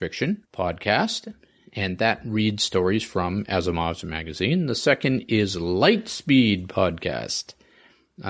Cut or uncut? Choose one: uncut